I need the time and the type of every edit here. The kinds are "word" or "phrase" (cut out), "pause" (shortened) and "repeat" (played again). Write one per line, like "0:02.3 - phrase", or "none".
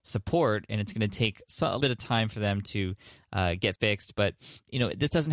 0:01.8 - word
0:03.8 - word